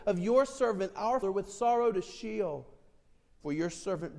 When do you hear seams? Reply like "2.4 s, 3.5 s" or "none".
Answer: 1.2 s